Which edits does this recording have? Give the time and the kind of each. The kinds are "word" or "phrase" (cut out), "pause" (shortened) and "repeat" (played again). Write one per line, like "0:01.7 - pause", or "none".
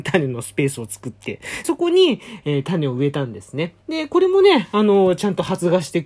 0:01.6 - word
0:03.8 - pause